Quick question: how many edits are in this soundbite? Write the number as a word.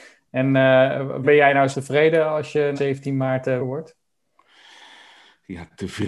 four